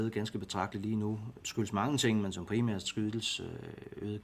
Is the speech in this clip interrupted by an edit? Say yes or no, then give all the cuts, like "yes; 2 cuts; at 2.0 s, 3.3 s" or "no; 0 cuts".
yes; 1 cut; at 1.4 s